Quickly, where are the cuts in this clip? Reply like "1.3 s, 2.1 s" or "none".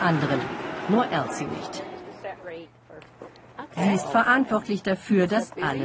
none